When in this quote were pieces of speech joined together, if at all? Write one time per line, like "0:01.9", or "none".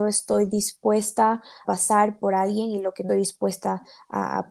0:01.6
0:03.1